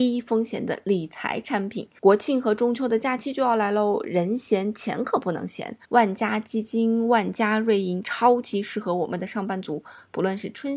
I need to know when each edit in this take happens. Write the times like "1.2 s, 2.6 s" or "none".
5.8 s